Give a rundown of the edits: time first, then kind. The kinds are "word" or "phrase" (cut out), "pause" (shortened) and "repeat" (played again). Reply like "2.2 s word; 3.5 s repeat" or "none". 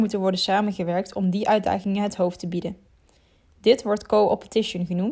none